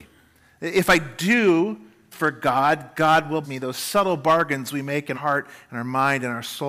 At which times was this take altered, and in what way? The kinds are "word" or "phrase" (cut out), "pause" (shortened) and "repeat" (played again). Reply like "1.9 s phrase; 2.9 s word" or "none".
2.1 s word; 3.4 s word; 5.1 s word